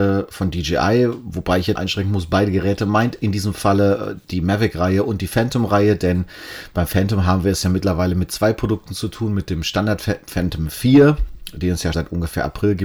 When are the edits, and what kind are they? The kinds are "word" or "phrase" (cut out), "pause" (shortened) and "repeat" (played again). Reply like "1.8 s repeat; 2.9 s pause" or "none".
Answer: 1.8 s word; 11.9 s word